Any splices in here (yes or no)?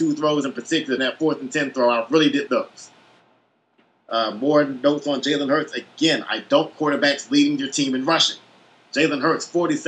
yes